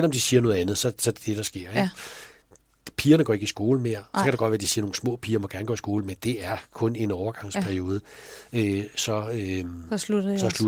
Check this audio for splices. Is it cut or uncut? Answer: uncut